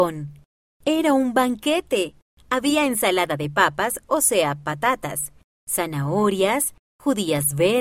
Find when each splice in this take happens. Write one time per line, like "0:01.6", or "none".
none